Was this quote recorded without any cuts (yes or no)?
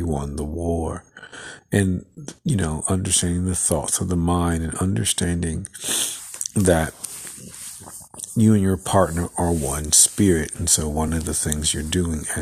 yes